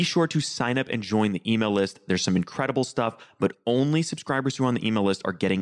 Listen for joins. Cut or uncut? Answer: uncut